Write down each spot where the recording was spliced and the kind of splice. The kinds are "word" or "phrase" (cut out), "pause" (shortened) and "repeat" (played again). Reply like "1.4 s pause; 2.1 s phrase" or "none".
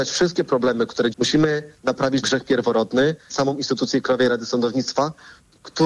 1.1 s phrase; 2.2 s word; 3.3 s phrase

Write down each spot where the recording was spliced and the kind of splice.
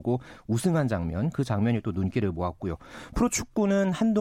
none

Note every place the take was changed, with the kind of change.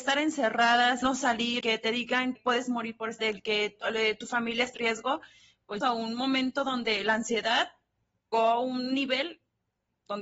1.0 s word; 1.6 s word; 2.3 s word; 3.2 s word; 4.7 s word; 5.8 s word; 8.3 s word

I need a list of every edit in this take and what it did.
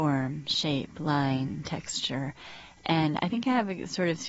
none

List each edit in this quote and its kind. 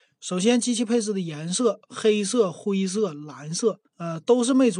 3.9 s pause

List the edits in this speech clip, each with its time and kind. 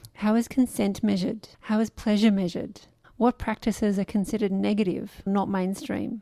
1.5 s pause; 3.0 s pause; 5.3 s word

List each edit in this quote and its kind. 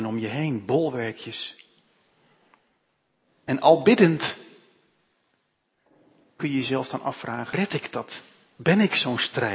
7.5 s word

